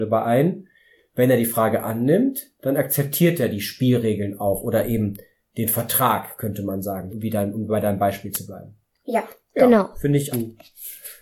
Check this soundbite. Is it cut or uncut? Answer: cut